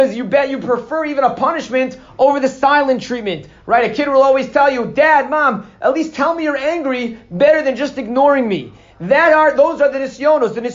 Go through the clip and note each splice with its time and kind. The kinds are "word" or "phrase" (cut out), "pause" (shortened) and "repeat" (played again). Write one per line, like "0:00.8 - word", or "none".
none